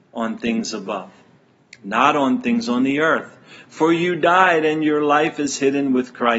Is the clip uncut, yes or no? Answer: yes